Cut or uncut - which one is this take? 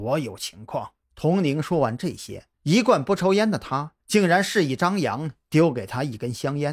cut